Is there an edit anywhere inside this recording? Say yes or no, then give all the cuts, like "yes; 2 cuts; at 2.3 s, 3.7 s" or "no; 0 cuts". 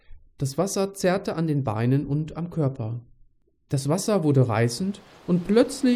no; 0 cuts